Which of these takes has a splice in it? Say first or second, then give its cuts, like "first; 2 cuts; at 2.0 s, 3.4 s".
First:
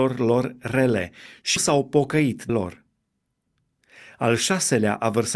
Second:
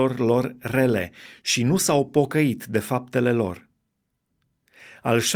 first; 2 cuts; at 1.6 s, 2.5 s